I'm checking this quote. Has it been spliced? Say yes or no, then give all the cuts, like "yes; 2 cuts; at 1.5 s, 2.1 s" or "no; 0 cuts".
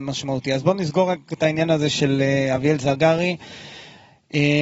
no; 0 cuts